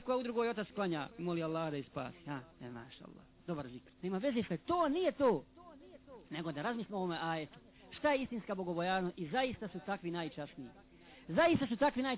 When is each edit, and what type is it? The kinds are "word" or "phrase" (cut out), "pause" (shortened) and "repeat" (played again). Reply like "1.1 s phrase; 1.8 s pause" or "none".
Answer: 1.1 s pause; 2.5 s pause; 3.9 s pause; 4.5 s word